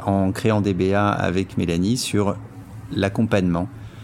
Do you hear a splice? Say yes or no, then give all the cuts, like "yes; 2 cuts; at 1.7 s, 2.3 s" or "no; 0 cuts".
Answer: no; 0 cuts